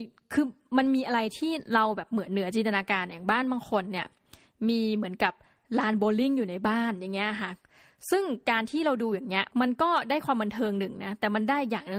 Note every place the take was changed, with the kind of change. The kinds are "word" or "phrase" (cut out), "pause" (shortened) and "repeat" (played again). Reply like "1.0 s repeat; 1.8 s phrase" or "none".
9.5 s pause